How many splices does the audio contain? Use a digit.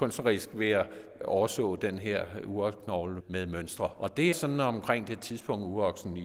1